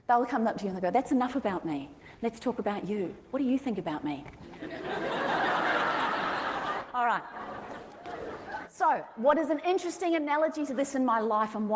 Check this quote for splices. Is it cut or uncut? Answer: uncut